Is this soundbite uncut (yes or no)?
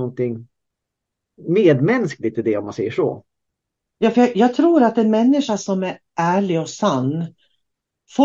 no